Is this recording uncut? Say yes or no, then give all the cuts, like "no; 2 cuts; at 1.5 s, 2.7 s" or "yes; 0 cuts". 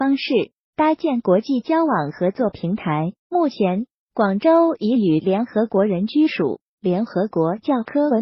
no; 1 cut; at 3.2 s